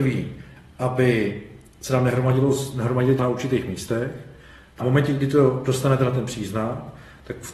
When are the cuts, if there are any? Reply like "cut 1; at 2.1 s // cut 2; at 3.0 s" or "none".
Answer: cut 1; at 3.2 s // cut 2; at 4.8 s